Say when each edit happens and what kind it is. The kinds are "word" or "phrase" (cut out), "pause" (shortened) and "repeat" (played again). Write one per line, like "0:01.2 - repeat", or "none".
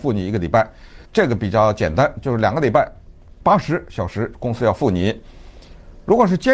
0:01.1 - pause